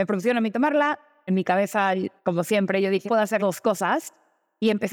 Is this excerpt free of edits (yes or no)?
no